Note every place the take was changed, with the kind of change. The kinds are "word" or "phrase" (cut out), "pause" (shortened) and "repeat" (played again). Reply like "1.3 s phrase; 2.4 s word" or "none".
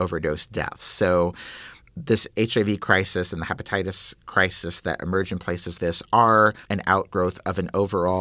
5.8 s word; 6.6 s pause